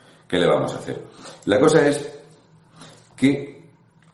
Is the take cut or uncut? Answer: uncut